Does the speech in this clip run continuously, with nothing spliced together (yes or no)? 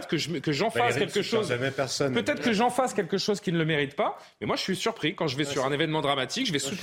yes